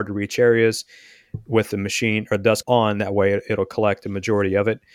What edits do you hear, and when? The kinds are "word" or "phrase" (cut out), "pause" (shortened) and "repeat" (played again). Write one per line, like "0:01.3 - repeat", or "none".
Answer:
0:02.6 - word

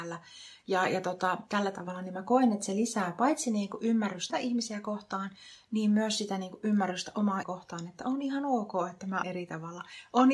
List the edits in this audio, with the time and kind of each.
0:04.3 - word
0:07.4 - word
0:09.2 - word

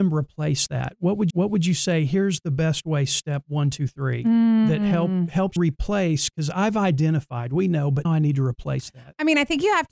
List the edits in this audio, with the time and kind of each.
0:01.3 - repeat
0:05.6 - word
0:08.0 - word

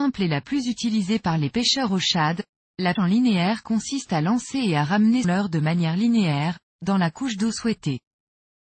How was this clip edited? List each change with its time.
0:03.0 - word
0:05.2 - word

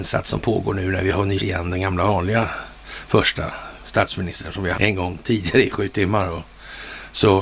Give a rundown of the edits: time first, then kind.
0:01.4 - word
0:03.8 - word
0:04.7 - word

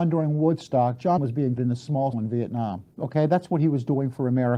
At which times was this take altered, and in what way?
0:01.2 - word
0:01.6 - word
0:02.1 - word
0:02.9 - pause

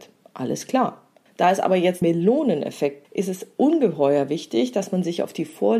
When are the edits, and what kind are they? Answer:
0:01.3 - pause
0:02.0 - word
0:03.0 - word

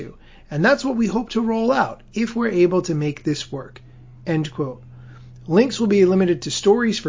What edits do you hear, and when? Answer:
none

